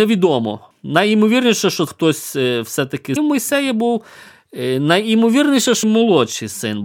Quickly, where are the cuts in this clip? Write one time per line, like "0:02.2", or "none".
0:01.9
0:03.2
0:05.8